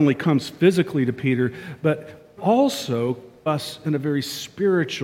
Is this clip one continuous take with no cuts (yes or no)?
no